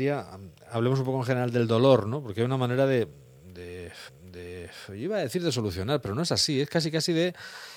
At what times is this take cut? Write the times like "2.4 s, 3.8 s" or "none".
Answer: 4.1 s

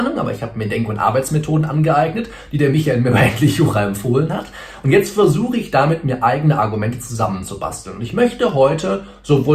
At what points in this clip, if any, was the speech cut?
none

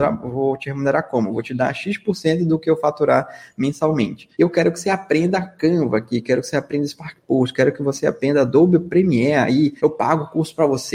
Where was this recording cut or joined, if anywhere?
4.3 s, 9.8 s

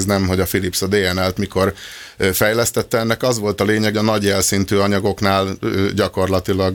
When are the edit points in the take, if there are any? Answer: 3.9 s

